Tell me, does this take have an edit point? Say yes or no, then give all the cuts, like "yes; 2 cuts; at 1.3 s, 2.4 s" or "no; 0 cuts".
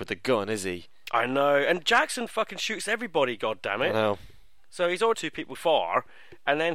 yes; 2 cuts; at 5.1 s, 5.5 s